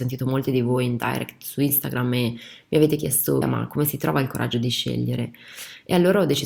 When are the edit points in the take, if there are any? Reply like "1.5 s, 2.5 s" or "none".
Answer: 3.4 s